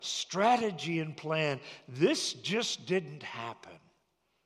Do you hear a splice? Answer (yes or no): no